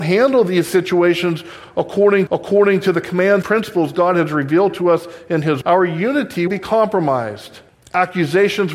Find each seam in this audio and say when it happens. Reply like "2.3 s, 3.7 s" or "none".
2.3 s, 3.4 s, 5.6 s, 6.5 s, 7.7 s